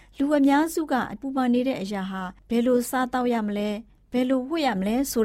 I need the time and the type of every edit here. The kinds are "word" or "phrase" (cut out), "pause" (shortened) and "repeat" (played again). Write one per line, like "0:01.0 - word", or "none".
0:01.2 - word
0:02.4 - pause